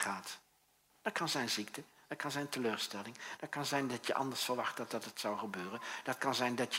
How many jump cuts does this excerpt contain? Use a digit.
0